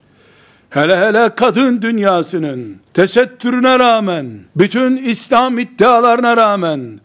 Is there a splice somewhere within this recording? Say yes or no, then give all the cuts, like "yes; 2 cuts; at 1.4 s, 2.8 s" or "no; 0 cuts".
yes; 2 cuts; at 2.9 s, 4.5 s